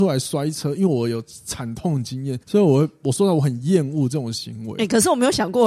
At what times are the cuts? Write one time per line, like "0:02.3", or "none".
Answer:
0:02.4